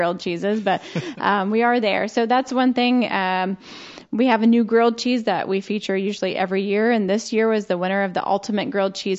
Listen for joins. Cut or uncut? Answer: uncut